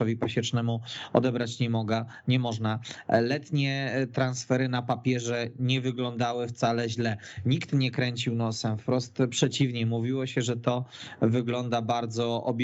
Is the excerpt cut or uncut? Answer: uncut